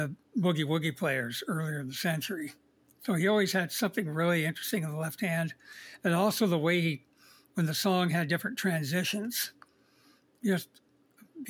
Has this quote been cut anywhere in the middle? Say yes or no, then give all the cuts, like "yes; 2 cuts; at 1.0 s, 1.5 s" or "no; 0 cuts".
no; 0 cuts